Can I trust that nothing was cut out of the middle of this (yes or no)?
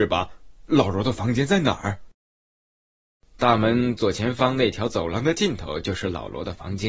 no